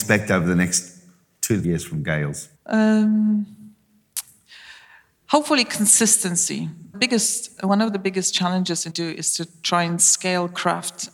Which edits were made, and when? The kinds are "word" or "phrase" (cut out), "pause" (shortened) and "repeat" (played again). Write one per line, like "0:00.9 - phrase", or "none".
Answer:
0:01.6 - word
0:02.6 - pause
0:06.9 - word
0:08.9 - phrase